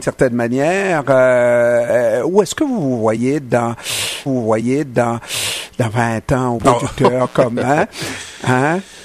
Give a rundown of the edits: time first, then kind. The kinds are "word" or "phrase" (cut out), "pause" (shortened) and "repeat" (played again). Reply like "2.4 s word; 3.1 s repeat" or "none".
4.3 s repeat; 6.6 s phrase